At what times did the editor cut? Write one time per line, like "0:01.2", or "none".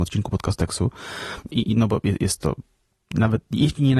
none